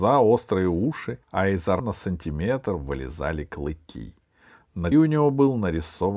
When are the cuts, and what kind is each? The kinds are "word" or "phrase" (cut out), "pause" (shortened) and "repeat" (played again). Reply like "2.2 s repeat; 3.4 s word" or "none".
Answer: 1.2 s pause; 1.8 s word; 4.9 s word